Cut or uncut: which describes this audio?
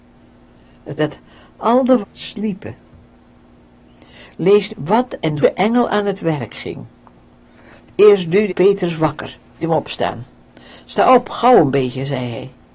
cut